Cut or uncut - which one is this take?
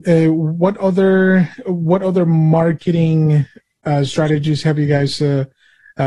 uncut